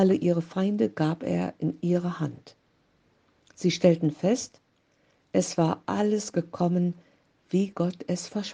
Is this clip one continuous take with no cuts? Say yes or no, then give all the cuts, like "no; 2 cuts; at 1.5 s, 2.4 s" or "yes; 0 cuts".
yes; 0 cuts